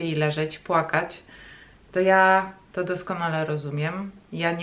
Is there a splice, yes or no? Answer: no